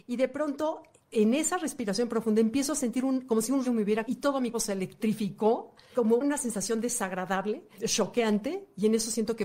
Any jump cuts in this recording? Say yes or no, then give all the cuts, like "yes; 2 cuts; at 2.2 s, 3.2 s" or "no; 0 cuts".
yes; 3 cuts; at 3.6 s, 4.1 s, 4.5 s